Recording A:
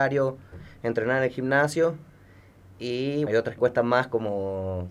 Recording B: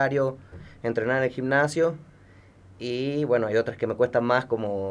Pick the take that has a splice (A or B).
A